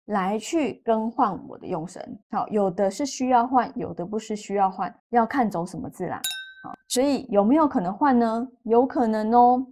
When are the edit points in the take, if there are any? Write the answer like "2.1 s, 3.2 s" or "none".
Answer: 2.2 s, 5.0 s, 6.8 s